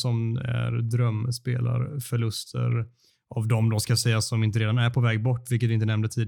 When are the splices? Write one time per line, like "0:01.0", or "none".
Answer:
none